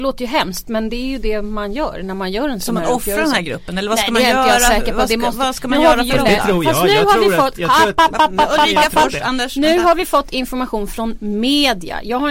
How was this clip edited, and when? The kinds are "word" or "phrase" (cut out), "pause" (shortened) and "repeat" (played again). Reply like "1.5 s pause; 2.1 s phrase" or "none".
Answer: none